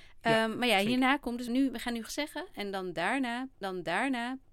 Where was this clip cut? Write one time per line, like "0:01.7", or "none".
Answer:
0:01.5
0:02.1
0:03.6